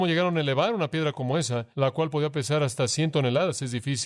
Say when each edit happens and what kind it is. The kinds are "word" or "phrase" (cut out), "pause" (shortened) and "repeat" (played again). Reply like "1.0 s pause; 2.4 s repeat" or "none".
1.7 s pause